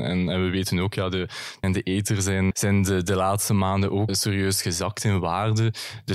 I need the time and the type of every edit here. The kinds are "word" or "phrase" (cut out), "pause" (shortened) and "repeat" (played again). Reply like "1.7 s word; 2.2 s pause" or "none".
1.6 s word; 2.5 s word; 4.1 s word